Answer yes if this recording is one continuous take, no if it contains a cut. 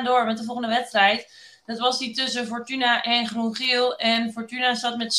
yes